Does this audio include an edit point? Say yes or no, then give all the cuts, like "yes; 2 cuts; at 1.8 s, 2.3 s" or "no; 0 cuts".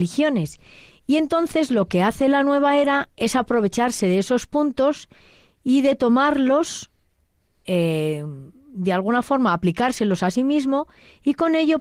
no; 0 cuts